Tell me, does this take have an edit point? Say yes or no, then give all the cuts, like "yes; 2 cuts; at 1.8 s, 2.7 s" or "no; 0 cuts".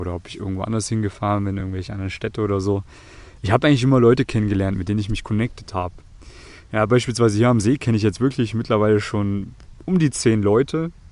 no; 0 cuts